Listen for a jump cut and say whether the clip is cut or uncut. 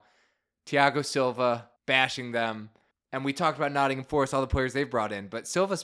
cut